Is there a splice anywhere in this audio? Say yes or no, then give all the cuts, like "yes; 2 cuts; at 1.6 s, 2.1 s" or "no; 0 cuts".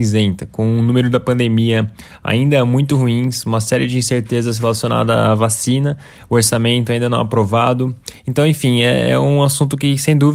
no; 0 cuts